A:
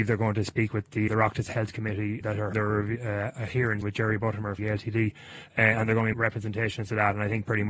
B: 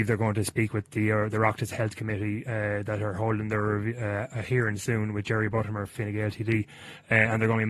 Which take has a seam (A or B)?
A